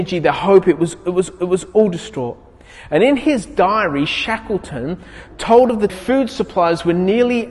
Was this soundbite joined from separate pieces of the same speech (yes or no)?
yes